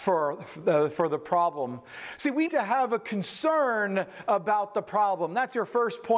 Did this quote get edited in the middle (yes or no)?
yes